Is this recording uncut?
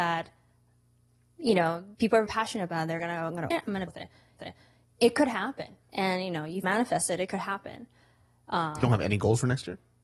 no; 8 cuts; at 1.9 s, 2.3 s, 3.5 s, 3.9 s, 4.4 s, 5.8 s, 6.6 s, 8.8 s

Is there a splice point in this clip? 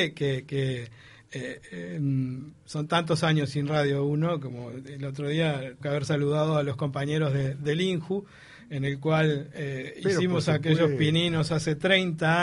yes; 1 cut; at 5.8 s

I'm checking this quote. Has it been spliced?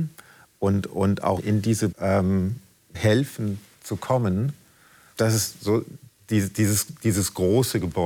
yes; 4 cuts; at 1.4 s, 1.9 s, 2.9 s, 5.1 s

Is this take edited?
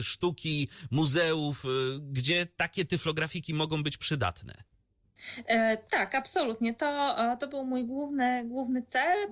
no; 0 cuts

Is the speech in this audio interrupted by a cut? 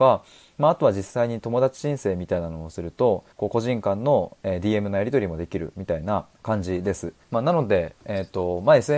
yes; 3 cuts; at 3.3 s, 6.3 s, 7.2 s

